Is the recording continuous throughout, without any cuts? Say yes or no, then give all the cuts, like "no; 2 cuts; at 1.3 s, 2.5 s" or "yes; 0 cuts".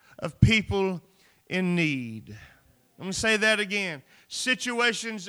yes; 0 cuts